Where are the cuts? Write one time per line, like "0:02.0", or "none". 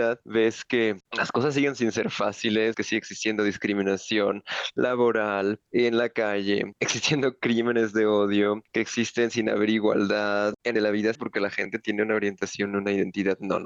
0:01.0
0:02.7
0:10.8
0:11.2